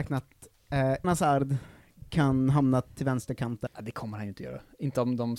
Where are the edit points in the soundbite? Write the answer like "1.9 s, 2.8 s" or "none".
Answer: 1.0 s, 3.7 s